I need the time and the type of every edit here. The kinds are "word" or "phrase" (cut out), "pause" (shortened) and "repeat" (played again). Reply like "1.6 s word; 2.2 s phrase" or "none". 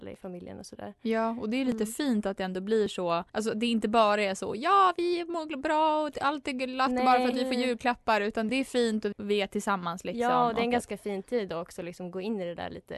3.3 s pause; 8.5 s phrase; 9.1 s word